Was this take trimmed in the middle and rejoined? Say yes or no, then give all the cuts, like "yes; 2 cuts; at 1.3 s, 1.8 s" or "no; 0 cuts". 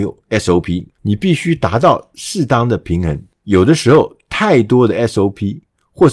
yes; 2 cuts; at 0.9 s, 3.3 s